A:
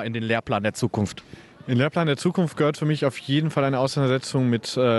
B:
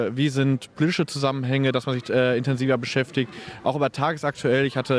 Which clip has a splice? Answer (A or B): B